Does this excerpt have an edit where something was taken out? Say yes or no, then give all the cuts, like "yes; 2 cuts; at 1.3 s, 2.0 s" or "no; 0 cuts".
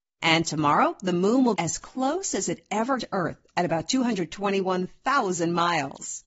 yes; 2 cuts; at 1.5 s, 3.0 s